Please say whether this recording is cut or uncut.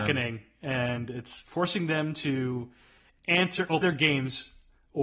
cut